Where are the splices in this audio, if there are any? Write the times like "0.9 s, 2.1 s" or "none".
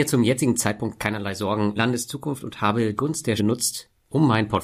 1.8 s, 3.0 s, 3.4 s